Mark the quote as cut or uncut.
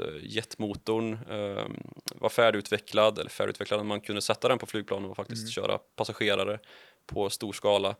uncut